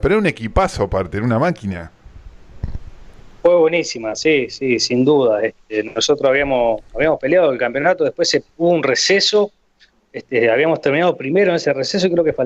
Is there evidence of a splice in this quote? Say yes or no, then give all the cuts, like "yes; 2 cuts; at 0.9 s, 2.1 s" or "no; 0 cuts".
no; 0 cuts